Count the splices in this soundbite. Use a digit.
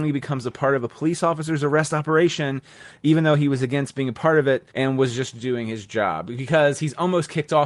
1